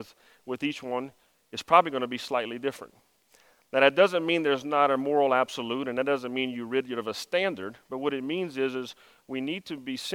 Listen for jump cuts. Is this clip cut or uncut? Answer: uncut